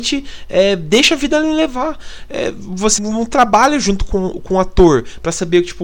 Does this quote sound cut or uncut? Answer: cut